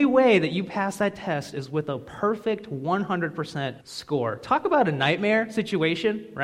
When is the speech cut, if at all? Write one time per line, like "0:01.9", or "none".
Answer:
0:03.8